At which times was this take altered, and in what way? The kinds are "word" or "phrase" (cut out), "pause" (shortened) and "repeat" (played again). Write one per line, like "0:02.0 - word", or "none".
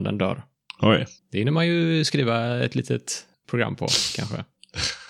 none